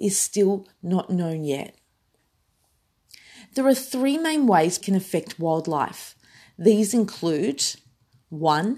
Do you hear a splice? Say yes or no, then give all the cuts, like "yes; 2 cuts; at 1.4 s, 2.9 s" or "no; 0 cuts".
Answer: yes; 1 cut; at 4.8 s